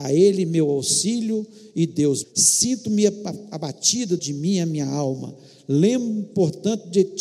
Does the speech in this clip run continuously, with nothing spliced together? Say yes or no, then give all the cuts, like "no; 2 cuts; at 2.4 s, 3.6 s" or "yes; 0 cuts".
no; 2 cuts; at 2.2 s, 4.2 s